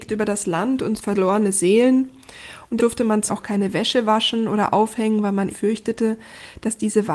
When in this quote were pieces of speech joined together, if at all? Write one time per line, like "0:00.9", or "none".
0:01.0
0:02.8
0:03.3
0:05.5